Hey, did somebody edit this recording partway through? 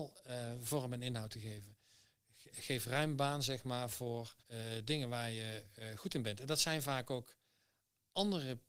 yes; 1 cut; at 4.4 s

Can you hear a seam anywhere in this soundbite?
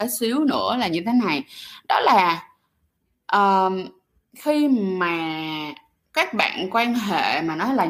no; 0 cuts

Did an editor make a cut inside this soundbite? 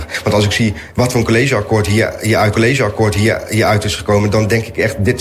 yes; 1 cut; at 2.5 s

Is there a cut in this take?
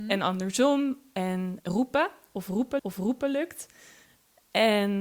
yes; 2 cuts; at 1.6 s, 2.8 s

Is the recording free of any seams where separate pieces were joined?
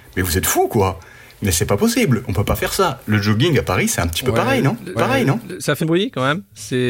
no; 2 cuts; at 4.9 s, 5.8 s

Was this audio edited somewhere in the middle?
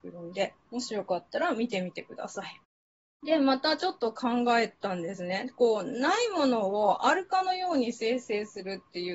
no; 0 cuts

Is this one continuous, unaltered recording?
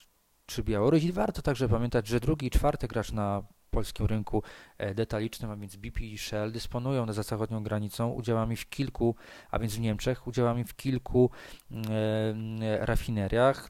yes; 0 cuts

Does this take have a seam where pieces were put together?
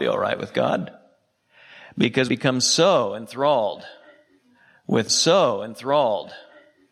yes; 2 cuts; at 2.3 s, 5.1 s

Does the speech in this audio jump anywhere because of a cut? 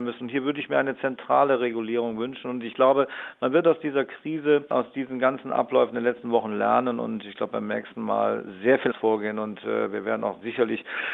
yes; 1 cut; at 8.9 s

